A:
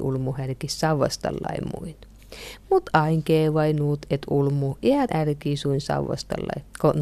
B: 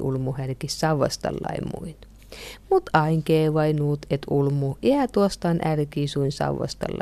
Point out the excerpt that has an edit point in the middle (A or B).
A